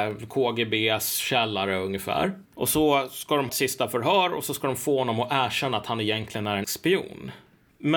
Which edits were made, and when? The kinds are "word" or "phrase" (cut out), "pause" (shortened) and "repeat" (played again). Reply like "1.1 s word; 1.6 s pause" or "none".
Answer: 2.4 s pause; 3.5 s phrase; 6.6 s word